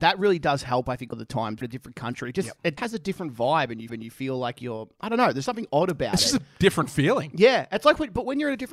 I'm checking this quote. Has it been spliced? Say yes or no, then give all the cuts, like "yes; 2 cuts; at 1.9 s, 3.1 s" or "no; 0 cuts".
yes; 5 cuts; at 1.1 s, 1.6 s, 2.8 s, 3.9 s, 5.5 s